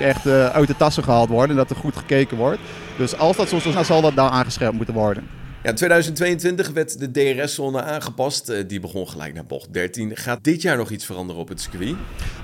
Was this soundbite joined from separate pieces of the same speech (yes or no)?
yes